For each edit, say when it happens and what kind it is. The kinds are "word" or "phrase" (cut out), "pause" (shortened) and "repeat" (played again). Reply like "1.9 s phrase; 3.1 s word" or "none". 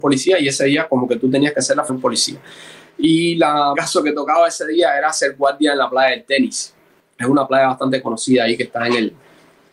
1.9 s word; 3.7 s phrase; 7.0 s pause